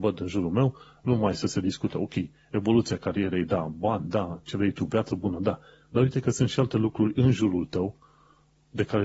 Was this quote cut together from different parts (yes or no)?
no